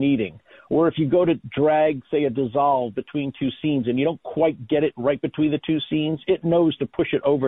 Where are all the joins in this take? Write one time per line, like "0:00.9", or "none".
none